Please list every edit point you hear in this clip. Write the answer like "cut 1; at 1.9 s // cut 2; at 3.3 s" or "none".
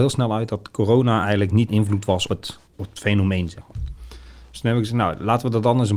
cut 1; at 1.7 s // cut 2; at 2.3 s // cut 3; at 2.7 s